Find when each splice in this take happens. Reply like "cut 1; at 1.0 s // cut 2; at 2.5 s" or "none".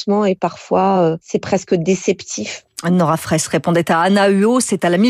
none